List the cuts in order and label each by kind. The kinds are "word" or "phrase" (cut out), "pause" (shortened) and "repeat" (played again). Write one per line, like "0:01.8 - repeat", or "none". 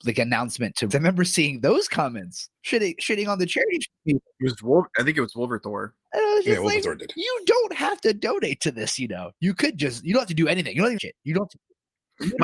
0:00.9 - phrase
0:02.6 - pause
0:11.0 - phrase